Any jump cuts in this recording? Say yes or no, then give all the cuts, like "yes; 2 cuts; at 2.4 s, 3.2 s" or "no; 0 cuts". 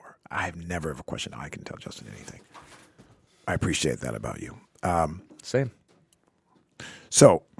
no; 0 cuts